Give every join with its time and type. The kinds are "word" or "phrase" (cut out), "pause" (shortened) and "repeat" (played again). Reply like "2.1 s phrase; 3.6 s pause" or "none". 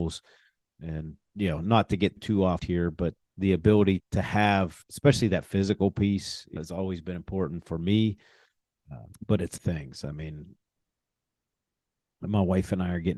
1.3 s pause; 2.2 s word; 2.6 s word; 3.2 s word; 4.0 s word; 4.8 s pause; 6.6 s word; 9.1 s pause; 9.6 s phrase